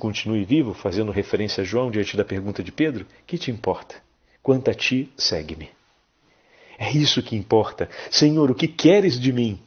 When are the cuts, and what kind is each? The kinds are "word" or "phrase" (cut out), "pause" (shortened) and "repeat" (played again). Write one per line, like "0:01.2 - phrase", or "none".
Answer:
none